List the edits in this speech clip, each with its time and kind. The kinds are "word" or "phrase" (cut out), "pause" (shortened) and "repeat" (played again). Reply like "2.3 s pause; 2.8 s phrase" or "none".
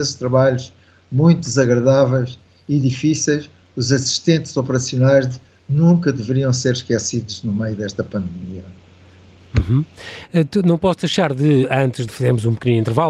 12.1 s word